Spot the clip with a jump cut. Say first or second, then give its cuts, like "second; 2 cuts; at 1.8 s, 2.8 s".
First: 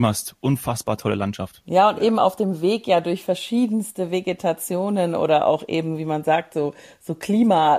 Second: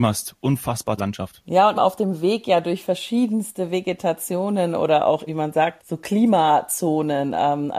second; 4 cuts; at 1.0 s, 1.8 s, 5.3 s, 5.8 s